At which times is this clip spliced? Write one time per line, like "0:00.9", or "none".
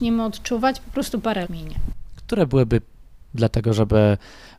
0:01.4
0:03.2